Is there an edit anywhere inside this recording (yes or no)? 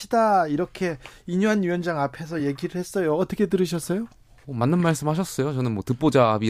no